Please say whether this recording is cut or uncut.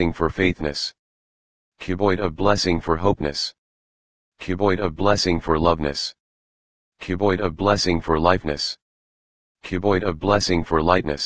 uncut